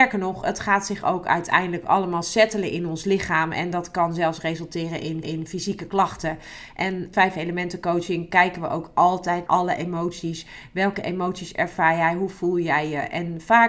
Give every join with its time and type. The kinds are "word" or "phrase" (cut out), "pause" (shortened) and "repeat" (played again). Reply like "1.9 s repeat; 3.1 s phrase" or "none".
5.2 s repeat; 7.1 s phrase; 9.5 s word